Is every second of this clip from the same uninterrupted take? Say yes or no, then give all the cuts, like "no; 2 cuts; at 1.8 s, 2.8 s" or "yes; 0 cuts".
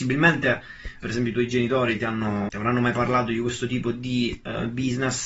no; 2 cuts; at 1.0 s, 2.5 s